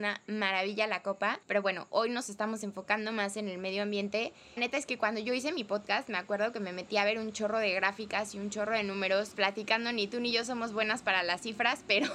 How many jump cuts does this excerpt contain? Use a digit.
3